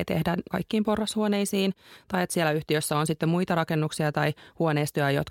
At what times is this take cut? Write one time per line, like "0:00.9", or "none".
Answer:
none

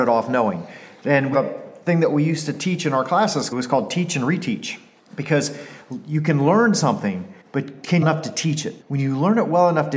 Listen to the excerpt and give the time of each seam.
0:01.3
0:03.5
0:05.0
0:07.4
0:08.0
0:08.8

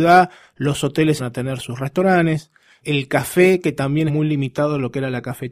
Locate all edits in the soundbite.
0:01.2
0:02.8
0:04.1

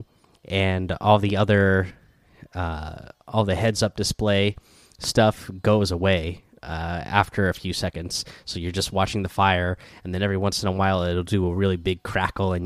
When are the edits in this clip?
none

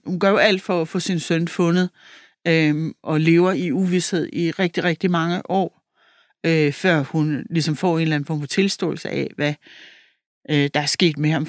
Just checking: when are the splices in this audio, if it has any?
none

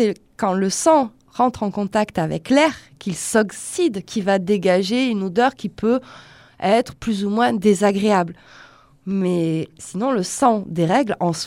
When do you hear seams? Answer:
none

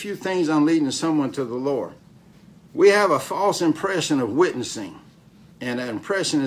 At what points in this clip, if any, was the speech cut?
0:02.3

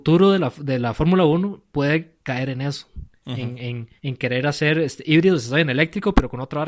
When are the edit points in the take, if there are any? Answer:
0:04.0

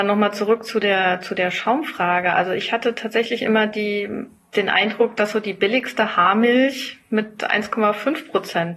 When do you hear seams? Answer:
none

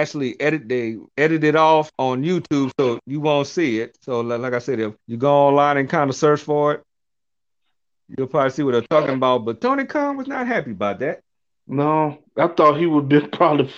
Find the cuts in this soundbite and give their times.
0:01.1
0:01.9
0:05.0
0:12.3

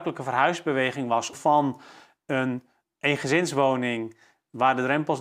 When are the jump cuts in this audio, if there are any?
0:01.3

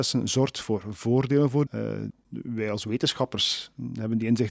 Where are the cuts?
0:01.7
0:02.1

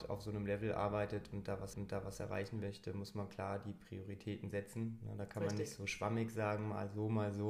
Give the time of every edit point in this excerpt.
0:01.7

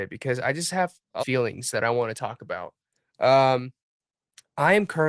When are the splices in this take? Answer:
0:01.2

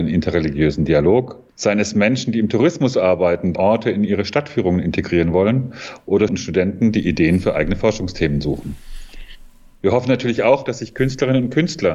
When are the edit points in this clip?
0:01.5
0:03.6
0:06.3

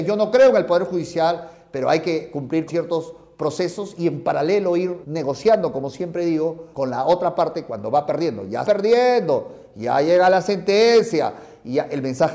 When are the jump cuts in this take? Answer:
0:02.7
0:05.0
0:06.7
0:08.6

